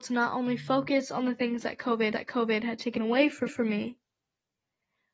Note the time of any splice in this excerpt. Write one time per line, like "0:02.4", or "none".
0:02.1
0:03.5